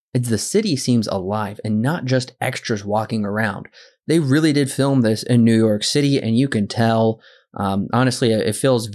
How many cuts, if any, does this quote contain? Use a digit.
0